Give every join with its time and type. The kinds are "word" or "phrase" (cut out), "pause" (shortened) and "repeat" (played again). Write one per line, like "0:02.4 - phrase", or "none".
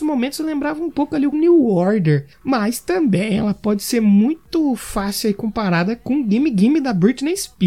0:01.3 - phrase
0:02.3 - pause